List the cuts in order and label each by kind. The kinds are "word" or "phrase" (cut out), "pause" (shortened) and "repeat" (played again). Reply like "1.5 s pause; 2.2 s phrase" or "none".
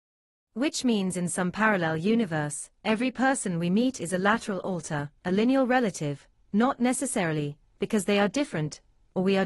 2.8 s pause; 5.2 s pause